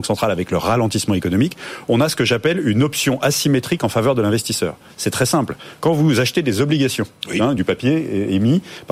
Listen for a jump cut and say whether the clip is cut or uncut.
cut